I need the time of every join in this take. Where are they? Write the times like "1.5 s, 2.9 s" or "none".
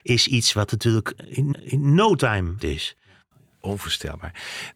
1.5 s, 2.6 s